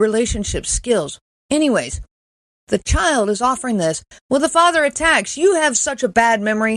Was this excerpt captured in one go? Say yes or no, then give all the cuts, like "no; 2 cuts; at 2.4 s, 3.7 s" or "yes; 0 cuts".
yes; 0 cuts